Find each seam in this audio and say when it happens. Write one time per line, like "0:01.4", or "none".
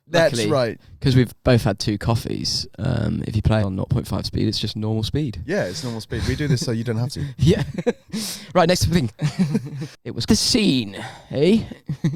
0:03.6
0:10.3